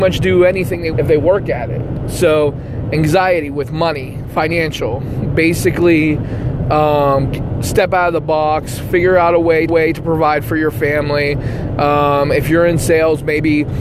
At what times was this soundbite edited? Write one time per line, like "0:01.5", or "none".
0:00.9
0:09.7